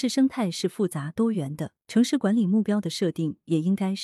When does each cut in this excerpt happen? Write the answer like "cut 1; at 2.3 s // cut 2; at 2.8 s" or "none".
cut 1; at 1.8 s